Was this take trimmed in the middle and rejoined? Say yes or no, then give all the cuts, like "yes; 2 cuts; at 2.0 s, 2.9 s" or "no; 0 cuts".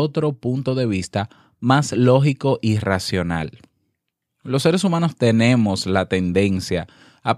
no; 0 cuts